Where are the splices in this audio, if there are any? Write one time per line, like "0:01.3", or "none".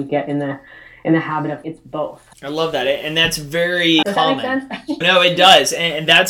0:01.6
0:02.3
0:04.0
0:05.0

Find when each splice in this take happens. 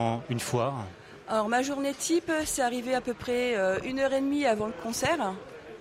none

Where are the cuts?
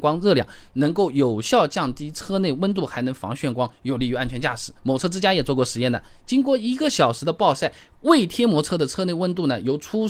0:04.8

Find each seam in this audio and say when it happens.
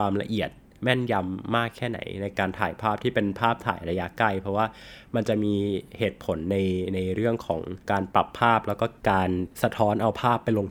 0:07.8
0:09.5

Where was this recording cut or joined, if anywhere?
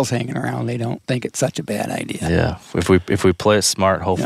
0:01.0

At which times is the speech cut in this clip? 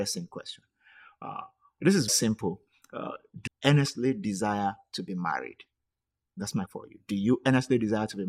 0:02.1
0:03.5
0:06.7

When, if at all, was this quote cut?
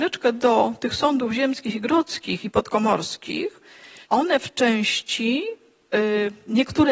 0:04.0

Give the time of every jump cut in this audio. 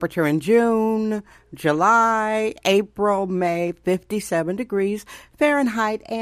none

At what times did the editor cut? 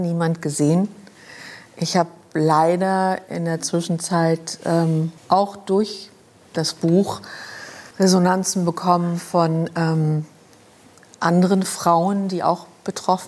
0:05.2
0:07.9

